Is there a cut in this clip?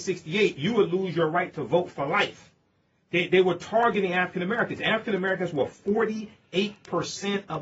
no; 0 cuts

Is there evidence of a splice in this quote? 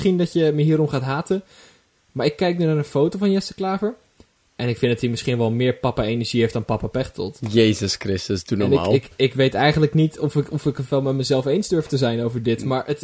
no; 0 cuts

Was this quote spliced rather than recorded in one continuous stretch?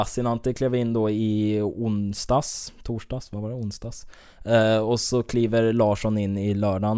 no; 0 cuts

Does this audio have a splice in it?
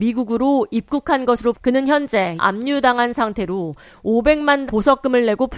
yes; 3 cuts; at 1.5 s, 2.4 s, 4.7 s

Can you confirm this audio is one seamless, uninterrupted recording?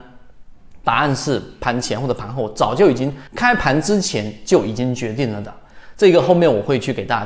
no; 1 cut; at 3.3 s

